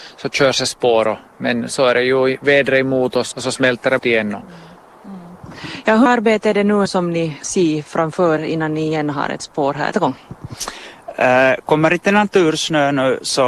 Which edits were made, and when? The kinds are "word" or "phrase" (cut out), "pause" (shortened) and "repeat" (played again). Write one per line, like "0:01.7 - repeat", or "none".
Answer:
0:03.3 - word
0:04.0 - word
0:06.1 - word
0:06.9 - word
0:07.4 - word
0:08.4 - word
0:09.4 - word
0:09.9 - word